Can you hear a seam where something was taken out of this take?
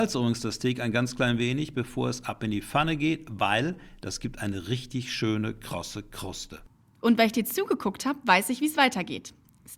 no; 0 cuts

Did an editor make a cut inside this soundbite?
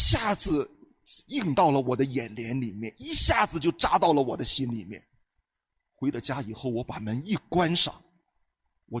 no; 0 cuts

